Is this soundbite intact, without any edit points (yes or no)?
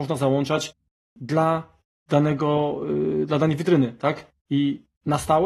yes